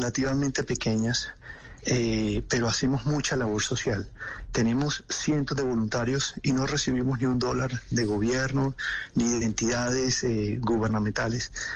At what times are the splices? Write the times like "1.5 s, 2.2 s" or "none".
none